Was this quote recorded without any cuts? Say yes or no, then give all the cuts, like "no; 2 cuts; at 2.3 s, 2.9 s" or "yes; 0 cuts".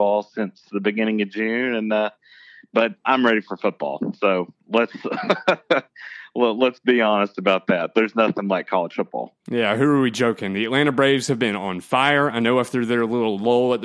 yes; 0 cuts